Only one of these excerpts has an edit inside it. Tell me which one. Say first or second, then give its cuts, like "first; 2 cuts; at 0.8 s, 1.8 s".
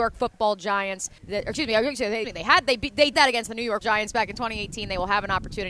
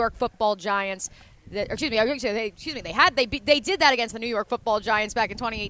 first; 4 cuts; at 1.2 s, 2.2 s, 3.1 s, 3.8 s